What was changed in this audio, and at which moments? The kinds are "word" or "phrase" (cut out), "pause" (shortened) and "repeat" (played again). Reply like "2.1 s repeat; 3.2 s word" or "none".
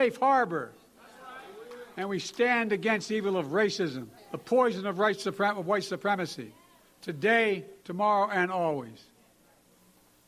4.2 s pause; 7.8 s pause